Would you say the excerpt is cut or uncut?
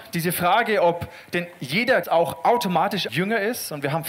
cut